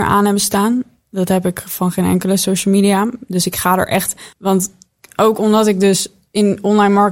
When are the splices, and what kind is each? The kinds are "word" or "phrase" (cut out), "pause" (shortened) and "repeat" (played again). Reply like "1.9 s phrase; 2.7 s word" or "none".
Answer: 4.3 s pause